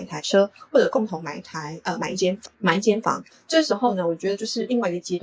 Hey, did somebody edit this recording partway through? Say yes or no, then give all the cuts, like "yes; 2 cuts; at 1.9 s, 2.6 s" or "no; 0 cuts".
yes; 1 cut; at 2.5 s